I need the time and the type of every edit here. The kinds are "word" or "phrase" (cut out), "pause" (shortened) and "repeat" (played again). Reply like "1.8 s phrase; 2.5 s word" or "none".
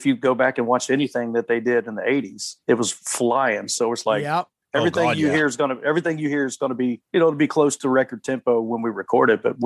2.6 s pause; 7.1 s pause

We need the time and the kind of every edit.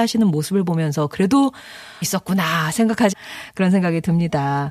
2.0 s word; 3.1 s word

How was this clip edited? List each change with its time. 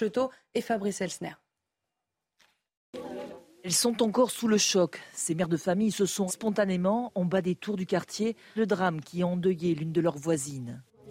6.3 s word; 8.6 s word

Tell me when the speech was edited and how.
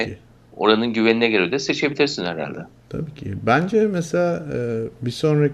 none

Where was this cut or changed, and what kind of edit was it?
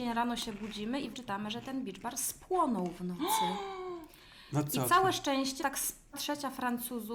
1.1 s phrase; 5.6 s word; 6.1 s word

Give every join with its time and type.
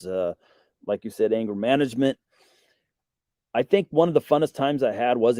none

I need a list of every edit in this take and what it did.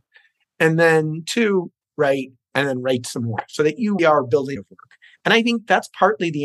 1.8 s word; 4.0 s word; 4.6 s phrase

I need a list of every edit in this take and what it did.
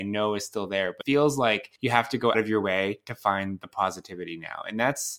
1.0 s word; 1.8 s pause; 2.3 s word

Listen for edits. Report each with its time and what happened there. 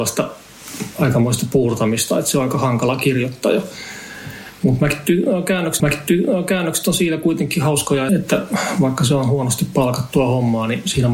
5.8 s repeat; 8.1 s word

